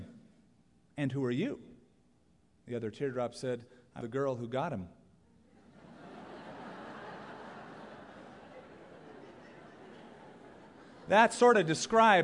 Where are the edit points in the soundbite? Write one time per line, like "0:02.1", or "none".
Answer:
0:04.0